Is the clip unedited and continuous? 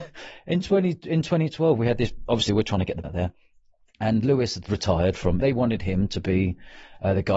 no; 4 cuts; at 2.3 s, 3.0 s, 4.7 s, 5.4 s

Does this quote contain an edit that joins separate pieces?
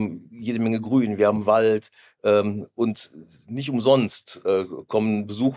no; 0 cuts

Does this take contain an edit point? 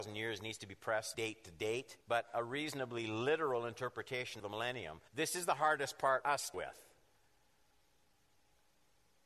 yes; 6 cuts; at 1.1 s, 2.0 s, 4.4 s, 5.1 s, 6.2 s, 6.5 s

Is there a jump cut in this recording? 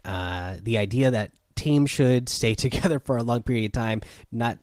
no; 0 cuts

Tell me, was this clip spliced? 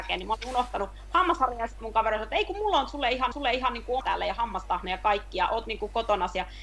yes; 2 cuts; at 3.3 s, 4.0 s

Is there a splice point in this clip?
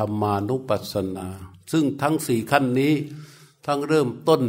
no; 0 cuts

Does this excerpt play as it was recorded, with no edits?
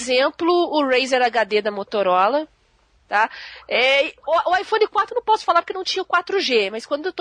yes; 0 cuts

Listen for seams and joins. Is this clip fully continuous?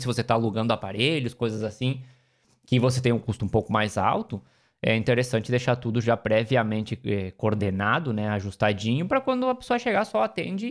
yes; 0 cuts

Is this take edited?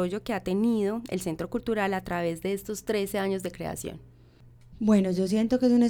no; 0 cuts

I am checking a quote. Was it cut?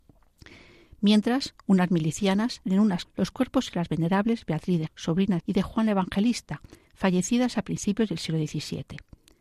yes; 5 cuts; at 2.6 s, 3.0 s, 3.7 s, 4.9 s, 5.4 s

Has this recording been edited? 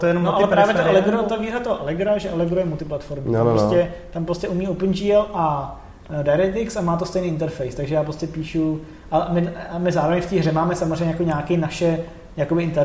no; 0 cuts

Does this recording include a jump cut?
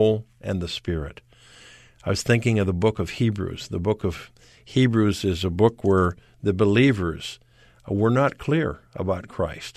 no; 0 cuts

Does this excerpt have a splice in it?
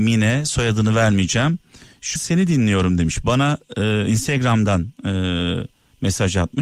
yes; 1 cut; at 2.2 s

